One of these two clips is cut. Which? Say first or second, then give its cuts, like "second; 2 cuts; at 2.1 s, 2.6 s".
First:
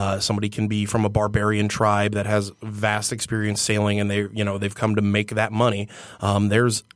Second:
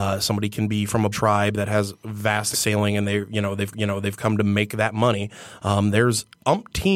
second; 3 cuts; at 1.1 s, 2.5 s, 3.7 s